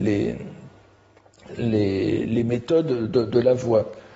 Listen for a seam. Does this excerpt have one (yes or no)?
no